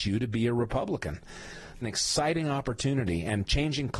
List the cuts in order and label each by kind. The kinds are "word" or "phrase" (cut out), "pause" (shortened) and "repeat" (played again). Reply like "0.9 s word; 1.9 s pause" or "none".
1.8 s phrase